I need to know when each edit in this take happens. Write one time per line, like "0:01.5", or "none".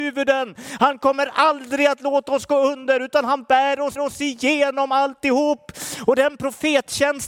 0:03.9